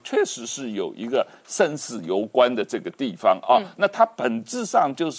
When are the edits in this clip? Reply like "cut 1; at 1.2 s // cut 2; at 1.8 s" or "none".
none

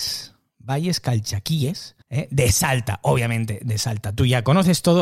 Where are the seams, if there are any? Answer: cut 1; at 2.0 s

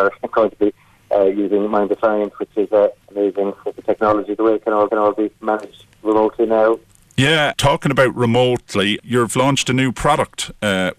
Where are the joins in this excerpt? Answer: cut 1; at 3.0 s // cut 2; at 4.9 s // cut 3; at 7.5 s // cut 4; at 9.0 s

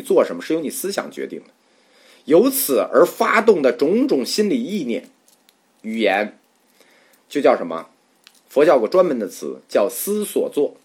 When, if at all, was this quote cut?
none

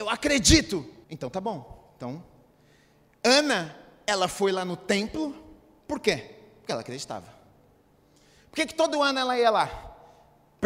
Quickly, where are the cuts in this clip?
cut 1; at 1.0 s

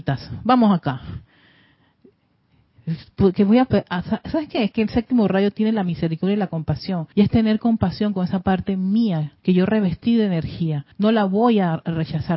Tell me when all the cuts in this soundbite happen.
cut 1; at 7.1 s // cut 2; at 9.4 s // cut 3; at 10.9 s

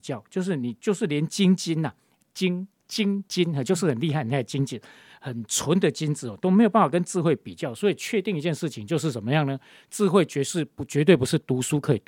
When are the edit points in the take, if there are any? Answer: none

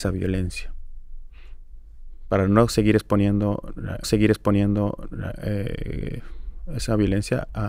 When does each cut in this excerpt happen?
cut 1; at 4.0 s

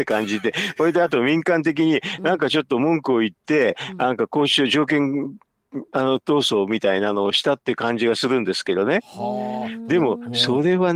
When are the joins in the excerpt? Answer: cut 1; at 5.9 s

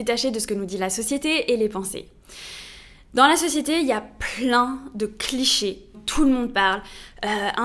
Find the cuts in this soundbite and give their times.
cut 1; at 5.9 s

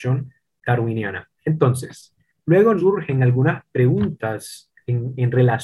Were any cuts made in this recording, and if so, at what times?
cut 1; at 1.4 s // cut 2; at 2.8 s

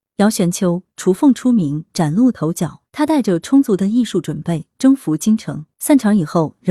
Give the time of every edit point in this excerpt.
cut 1; at 2.9 s // cut 2; at 5.7 s

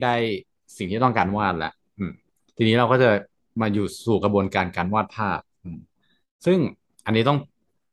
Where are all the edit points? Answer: none

